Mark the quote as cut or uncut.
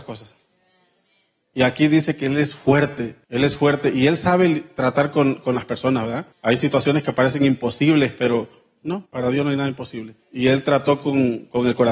cut